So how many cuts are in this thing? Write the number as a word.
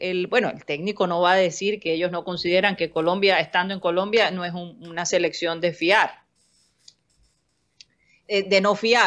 zero